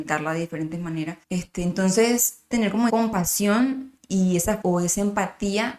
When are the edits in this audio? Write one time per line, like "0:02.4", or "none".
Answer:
0:01.2
0:02.5
0:02.9
0:04.0
0:04.6